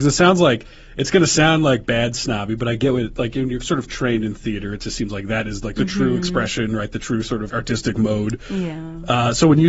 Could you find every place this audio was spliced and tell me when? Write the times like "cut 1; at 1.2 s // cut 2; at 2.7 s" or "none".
cut 1; at 7.5 s

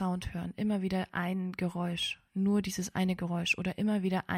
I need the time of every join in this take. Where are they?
none

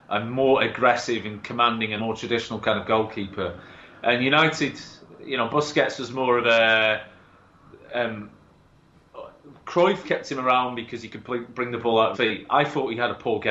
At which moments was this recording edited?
cut 1; at 2.0 s // cut 2; at 10.0 s // cut 3; at 12.1 s

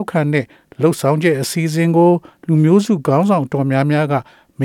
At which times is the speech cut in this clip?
none

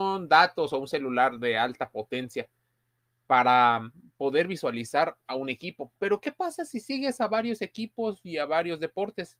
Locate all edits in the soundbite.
cut 1; at 6.0 s

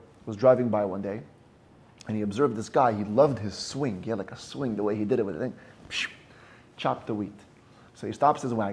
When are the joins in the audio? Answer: none

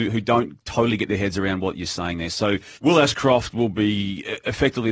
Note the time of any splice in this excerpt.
cut 1; at 2.8 s

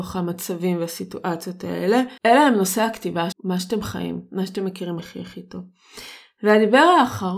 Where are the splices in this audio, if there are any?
cut 1; at 2.2 s // cut 2; at 3.3 s // cut 3; at 5.0 s

